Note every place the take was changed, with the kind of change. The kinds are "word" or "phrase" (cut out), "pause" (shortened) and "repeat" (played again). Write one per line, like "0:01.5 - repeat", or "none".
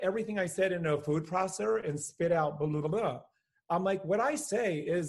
none